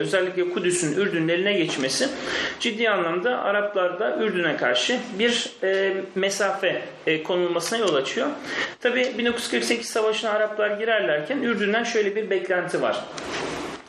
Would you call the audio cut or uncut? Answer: uncut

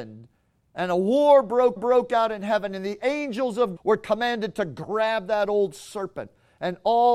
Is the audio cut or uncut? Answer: cut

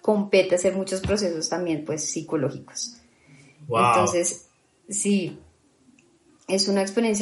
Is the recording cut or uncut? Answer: uncut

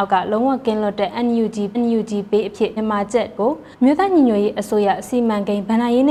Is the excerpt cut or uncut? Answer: cut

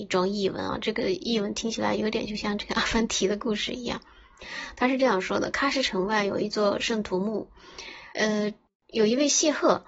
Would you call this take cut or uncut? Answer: cut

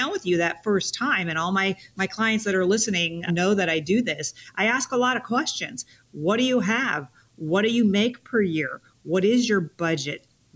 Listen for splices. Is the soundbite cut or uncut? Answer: cut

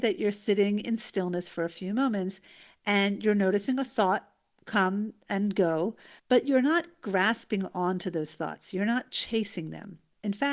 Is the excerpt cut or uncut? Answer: cut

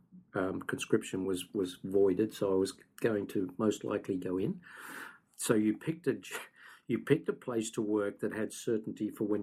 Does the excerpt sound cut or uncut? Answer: uncut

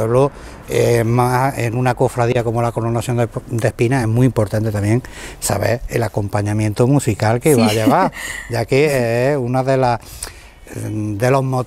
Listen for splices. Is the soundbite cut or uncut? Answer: uncut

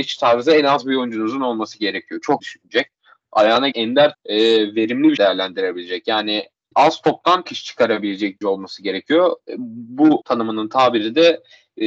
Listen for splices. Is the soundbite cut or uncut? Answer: cut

